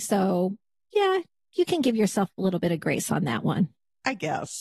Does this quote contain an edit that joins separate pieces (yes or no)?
no